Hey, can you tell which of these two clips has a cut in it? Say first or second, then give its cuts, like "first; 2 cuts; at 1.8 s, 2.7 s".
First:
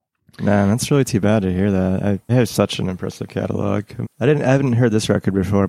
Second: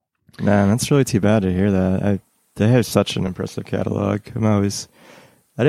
first; 2 cuts; at 2.3 s, 4.0 s